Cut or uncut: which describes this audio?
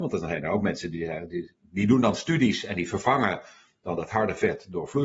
uncut